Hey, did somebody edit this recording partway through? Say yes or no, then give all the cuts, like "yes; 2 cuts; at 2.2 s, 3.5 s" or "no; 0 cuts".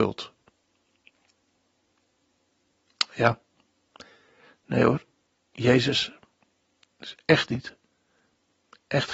no; 0 cuts